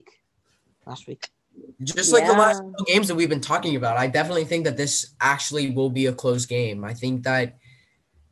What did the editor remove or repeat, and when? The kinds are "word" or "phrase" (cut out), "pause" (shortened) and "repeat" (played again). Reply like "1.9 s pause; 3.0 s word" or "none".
1.7 s pause